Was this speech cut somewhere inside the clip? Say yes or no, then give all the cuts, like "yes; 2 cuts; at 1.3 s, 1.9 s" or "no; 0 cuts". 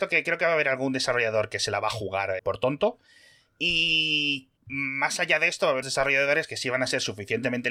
yes; 3 cuts; at 2.4 s, 4.6 s, 5.8 s